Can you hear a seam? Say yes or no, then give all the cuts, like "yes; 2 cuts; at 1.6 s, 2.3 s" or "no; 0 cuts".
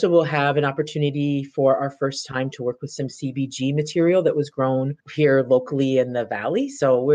yes; 1 cut; at 5.0 s